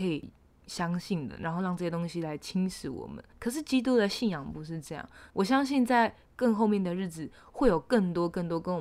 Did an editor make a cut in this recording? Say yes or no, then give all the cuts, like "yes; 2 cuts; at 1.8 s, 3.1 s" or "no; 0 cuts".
yes; 2 cuts; at 3.3 s, 5.3 s